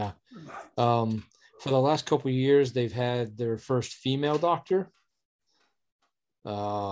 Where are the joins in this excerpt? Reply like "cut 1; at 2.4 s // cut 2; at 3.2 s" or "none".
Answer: none